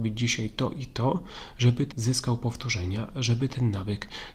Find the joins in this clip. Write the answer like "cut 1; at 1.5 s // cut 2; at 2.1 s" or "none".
cut 1; at 1.9 s

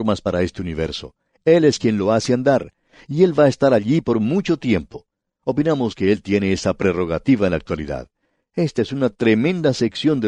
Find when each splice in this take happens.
none

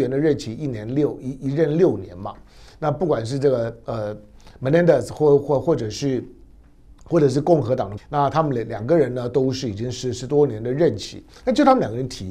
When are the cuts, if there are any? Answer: cut 1; at 8.0 s

